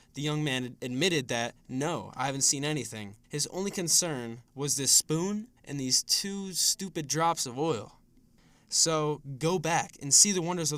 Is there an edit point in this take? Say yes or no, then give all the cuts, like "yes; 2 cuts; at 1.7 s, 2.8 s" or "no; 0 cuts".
yes; 3 cuts; at 3.2 s, 4.5 s, 5.6 s